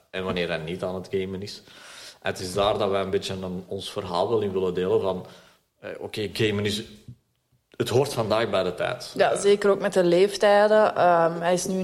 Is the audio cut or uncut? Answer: uncut